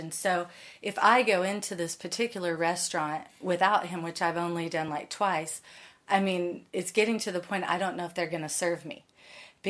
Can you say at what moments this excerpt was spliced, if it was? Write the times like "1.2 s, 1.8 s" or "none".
none

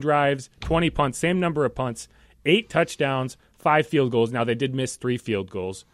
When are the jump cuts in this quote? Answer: none

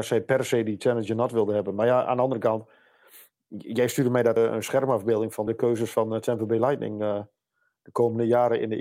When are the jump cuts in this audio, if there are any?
4.4 s, 5.5 s

